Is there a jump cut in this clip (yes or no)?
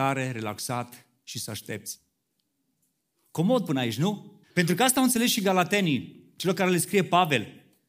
yes